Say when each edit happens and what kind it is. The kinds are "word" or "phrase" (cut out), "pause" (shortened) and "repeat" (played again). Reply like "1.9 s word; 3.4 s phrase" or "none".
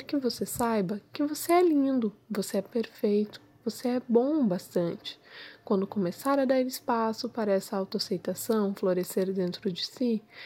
none